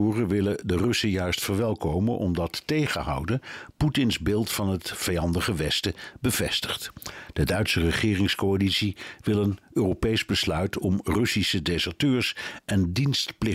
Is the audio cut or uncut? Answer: uncut